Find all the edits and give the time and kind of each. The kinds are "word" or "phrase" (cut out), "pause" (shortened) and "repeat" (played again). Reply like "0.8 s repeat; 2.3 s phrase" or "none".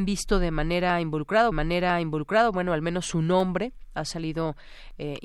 1.5 s repeat